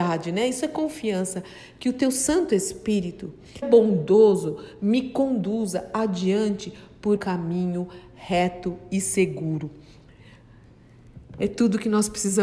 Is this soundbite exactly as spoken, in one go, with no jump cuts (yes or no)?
no